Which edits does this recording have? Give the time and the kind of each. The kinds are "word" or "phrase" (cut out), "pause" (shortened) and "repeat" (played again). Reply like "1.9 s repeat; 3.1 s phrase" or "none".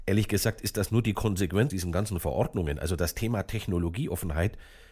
1.7 s word